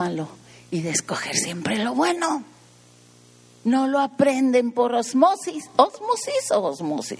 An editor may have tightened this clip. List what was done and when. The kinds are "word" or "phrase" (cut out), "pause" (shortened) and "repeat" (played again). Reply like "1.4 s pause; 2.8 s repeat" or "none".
none